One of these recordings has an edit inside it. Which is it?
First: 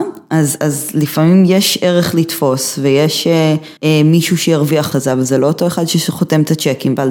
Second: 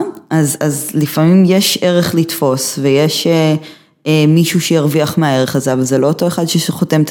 first; 2 cuts; at 3.8 s, 4.9 s

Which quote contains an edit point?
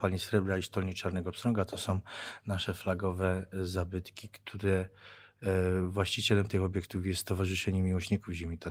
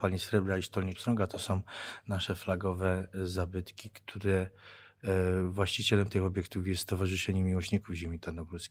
second; 1 cut; at 0.9 s

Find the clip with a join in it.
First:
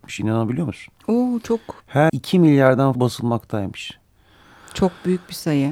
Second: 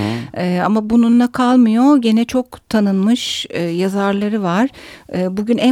first; 2 cuts; at 2.1 s, 2.9 s

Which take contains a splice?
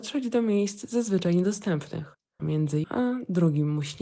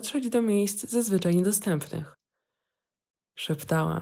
first; 2 cuts; at 2.4 s, 2.8 s

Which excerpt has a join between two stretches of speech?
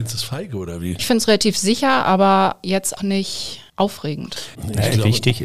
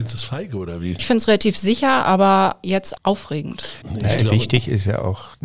second; 1 cut; at 3.0 s

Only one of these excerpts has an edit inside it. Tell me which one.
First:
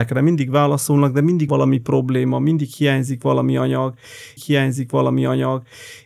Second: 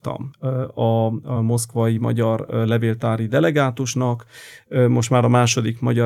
first; 2 cuts; at 1.5 s, 4.4 s

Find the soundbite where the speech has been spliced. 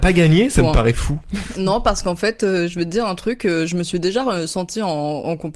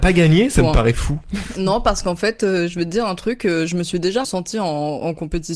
second; 1 cut; at 4.2 s

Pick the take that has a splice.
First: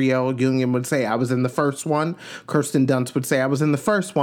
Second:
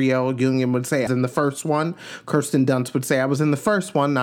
second; 1 cut; at 1.1 s

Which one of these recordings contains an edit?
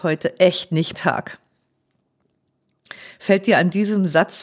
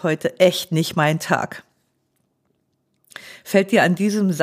first; 1 cut; at 0.9 s

